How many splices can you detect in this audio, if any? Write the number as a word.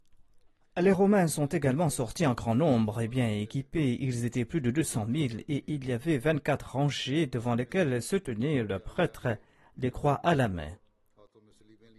zero